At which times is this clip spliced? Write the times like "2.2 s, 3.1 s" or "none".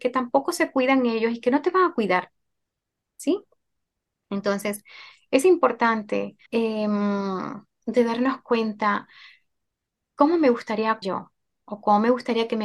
6.5 s, 11.0 s